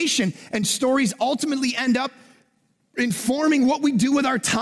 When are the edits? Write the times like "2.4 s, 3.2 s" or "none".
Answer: none